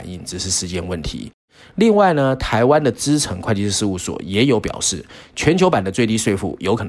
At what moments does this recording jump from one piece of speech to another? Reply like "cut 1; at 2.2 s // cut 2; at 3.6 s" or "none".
none

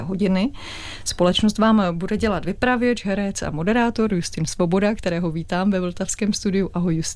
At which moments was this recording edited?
none

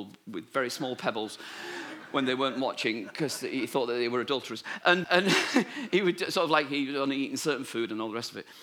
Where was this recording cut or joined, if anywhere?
cut 1; at 5.0 s

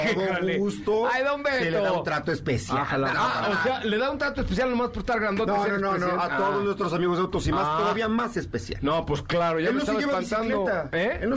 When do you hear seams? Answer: cut 1; at 3.1 s

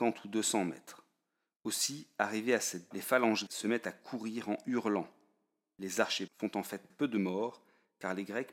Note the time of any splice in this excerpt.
cut 1; at 2.9 s // cut 2; at 3.5 s // cut 3; at 6.3 s // cut 4; at 6.9 s

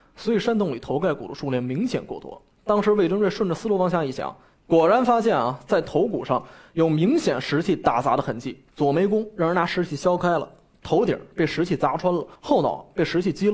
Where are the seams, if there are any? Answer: cut 1; at 2.5 s // cut 2; at 8.7 s // cut 3; at 12.4 s

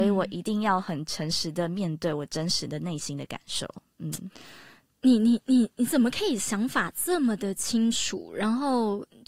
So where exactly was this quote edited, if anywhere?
none

